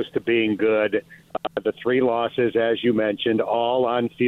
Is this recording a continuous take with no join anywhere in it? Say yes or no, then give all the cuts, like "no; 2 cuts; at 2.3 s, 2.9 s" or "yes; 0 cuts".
no; 1 cut; at 1.2 s